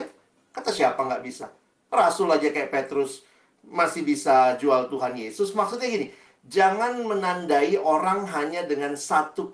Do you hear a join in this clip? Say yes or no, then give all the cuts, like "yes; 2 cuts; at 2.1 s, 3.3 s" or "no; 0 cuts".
no; 0 cuts